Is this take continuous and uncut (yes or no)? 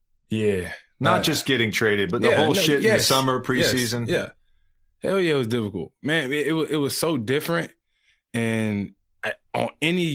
yes